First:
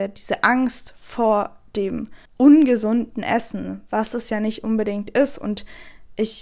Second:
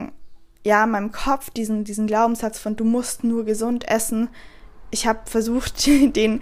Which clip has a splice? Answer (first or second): first